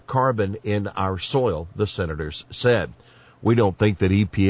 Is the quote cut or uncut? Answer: uncut